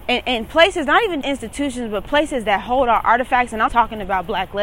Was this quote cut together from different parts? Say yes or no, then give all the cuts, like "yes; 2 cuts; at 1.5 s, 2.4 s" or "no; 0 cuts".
yes; 2 cuts; at 1.2 s, 3.7 s